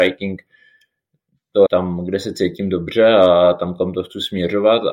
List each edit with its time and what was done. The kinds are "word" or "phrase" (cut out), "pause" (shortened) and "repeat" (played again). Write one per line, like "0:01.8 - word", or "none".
0:01.7 - word